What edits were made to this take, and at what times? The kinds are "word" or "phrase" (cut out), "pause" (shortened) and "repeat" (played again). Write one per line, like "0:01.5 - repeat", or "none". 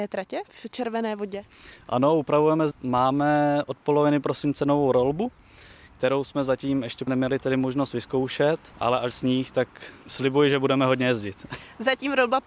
0:02.7 - phrase
0:07.1 - word
0:08.7 - pause
0:09.1 - word